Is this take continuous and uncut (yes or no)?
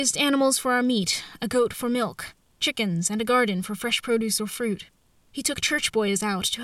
yes